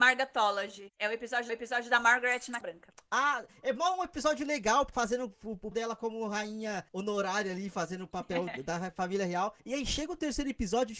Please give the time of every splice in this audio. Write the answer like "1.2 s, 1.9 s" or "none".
1.5 s, 2.6 s, 4.9 s, 5.7 s, 6.9 s, 9.6 s